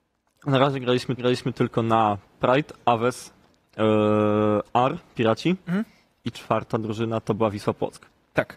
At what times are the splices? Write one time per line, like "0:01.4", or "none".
0:01.2